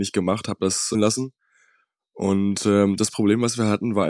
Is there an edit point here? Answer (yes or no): yes